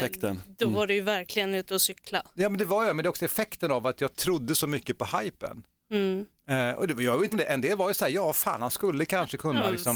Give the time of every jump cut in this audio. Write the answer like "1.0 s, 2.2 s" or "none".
7.3 s